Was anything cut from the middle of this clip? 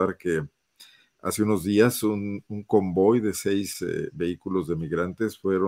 no; 0 cuts

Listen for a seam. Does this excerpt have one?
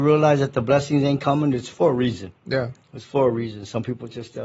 yes; 1 cut; at 2.4 s

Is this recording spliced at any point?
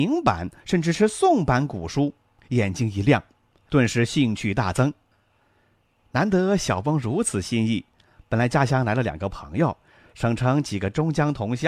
no; 0 cuts

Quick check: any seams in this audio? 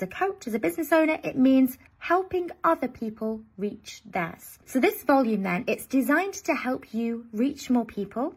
yes; 2 cuts; at 1.9 s, 4.6 s

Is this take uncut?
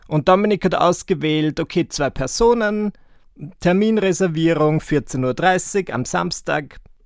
yes; 0 cuts

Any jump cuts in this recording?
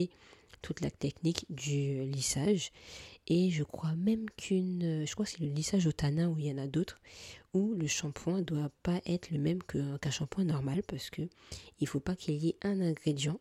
no; 0 cuts

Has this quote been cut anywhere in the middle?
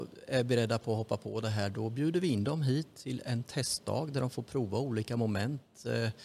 no; 0 cuts

